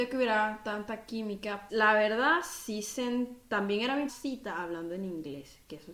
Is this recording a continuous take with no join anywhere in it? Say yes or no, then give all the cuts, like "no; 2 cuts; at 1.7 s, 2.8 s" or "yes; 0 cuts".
no; 2 cuts; at 1.7 s, 4.1 s